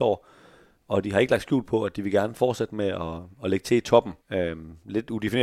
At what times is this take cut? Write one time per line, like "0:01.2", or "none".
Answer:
0:04.2